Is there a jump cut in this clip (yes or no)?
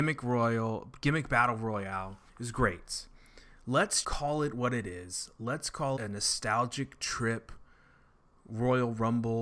yes